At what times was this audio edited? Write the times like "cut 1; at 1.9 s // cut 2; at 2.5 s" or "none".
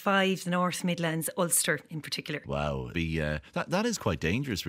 cut 1; at 2.9 s